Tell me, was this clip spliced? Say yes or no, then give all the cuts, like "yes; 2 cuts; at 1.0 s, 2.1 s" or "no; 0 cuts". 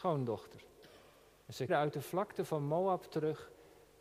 yes; 1 cut; at 1.7 s